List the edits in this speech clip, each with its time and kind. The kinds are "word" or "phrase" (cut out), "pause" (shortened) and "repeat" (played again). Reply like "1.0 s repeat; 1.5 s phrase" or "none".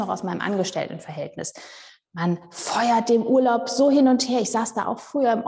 none